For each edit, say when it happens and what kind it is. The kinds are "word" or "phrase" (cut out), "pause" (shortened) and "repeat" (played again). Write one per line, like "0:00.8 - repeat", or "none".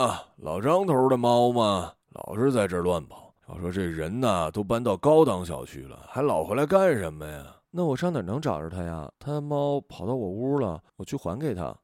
0:02.0 - pause
0:03.4 - pause
0:07.6 - pause
0:09.1 - pause
0:10.9 - pause